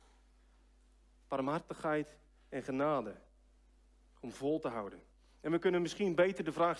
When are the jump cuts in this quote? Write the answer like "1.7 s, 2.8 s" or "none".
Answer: none